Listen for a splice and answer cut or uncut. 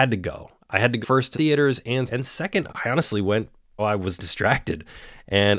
cut